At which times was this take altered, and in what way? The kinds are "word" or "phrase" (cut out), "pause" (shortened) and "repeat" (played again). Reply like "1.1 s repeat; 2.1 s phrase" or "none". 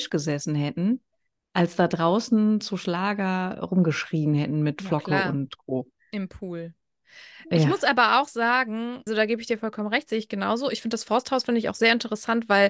9.1 s word

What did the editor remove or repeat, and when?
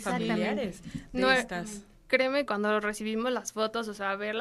2.5 s word

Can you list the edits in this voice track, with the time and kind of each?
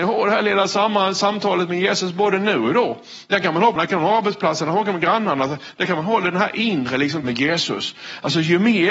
3.8 s word; 7.2 s word

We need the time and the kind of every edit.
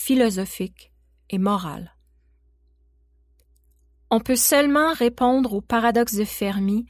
none

